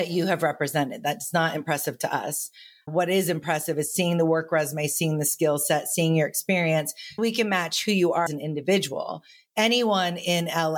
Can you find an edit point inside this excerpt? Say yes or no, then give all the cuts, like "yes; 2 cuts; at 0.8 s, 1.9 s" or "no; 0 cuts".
yes; 3 cuts; at 2.9 s, 7.2 s, 8.3 s